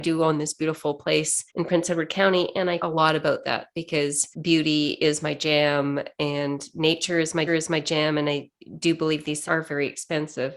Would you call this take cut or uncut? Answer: cut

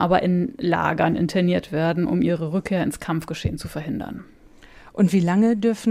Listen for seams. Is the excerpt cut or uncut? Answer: uncut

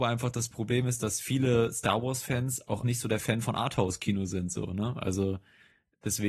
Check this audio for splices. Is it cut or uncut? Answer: cut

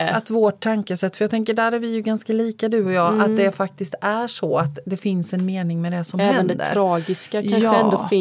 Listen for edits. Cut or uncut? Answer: uncut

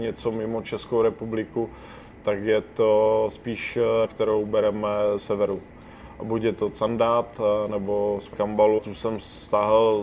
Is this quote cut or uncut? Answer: cut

